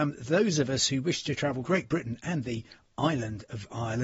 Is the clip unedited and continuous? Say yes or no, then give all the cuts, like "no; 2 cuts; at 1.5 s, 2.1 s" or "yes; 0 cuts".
no; 1 cut; at 1.6 s